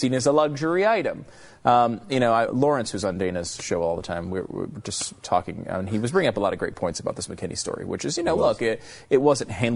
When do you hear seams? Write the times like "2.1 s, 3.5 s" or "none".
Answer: 2.5 s